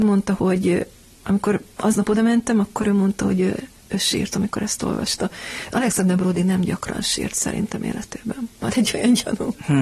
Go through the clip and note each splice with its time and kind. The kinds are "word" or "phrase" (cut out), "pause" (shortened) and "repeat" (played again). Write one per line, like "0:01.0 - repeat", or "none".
none